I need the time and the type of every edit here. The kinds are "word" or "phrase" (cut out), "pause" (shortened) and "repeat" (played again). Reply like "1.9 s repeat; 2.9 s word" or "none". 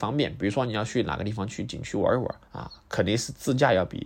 2.4 s pause